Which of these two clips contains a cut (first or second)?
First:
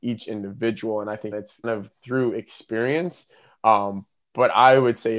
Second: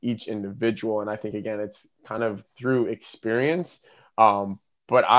first